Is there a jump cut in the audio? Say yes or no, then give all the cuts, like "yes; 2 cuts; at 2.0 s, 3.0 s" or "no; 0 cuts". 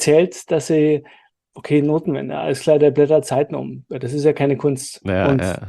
no; 0 cuts